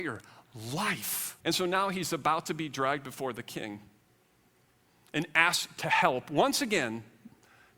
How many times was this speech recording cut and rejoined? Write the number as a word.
one